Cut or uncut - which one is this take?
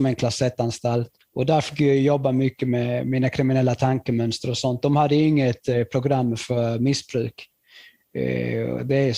uncut